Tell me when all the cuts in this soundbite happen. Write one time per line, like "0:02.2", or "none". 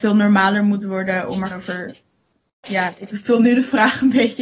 0:01.5
0:03.1